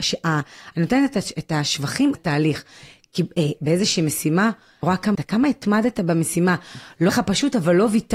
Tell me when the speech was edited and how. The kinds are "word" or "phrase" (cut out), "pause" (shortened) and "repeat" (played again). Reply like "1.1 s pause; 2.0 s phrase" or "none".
2.1 s word; 3.6 s word; 4.8 s word; 5.1 s word; 7.1 s word